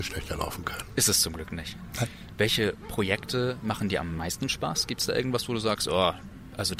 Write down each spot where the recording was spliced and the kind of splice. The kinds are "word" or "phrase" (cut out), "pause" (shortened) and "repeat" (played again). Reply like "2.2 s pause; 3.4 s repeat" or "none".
none